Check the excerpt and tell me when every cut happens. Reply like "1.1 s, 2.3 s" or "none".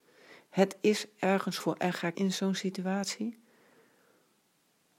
1.6 s, 2.1 s